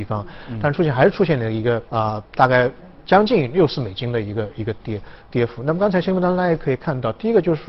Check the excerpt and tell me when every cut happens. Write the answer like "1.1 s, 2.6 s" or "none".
1.9 s, 2.3 s